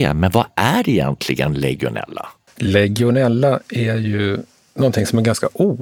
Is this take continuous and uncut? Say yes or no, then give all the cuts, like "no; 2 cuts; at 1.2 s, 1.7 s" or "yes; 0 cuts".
yes; 0 cuts